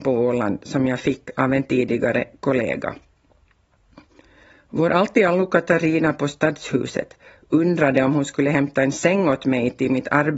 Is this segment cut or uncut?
uncut